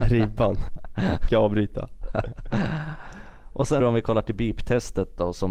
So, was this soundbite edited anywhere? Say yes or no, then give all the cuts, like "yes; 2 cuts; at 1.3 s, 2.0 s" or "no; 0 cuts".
yes; 2 cuts; at 1.3 s, 3.8 s